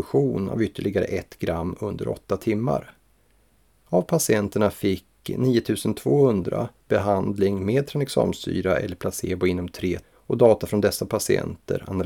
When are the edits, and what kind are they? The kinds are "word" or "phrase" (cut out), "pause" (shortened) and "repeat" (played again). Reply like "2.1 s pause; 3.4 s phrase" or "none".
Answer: 10.0 s word